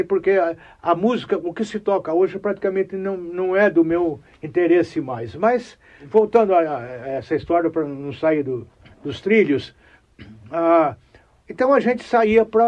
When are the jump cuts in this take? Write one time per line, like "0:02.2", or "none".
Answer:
none